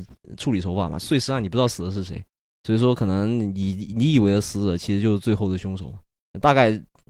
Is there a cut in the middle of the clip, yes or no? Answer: no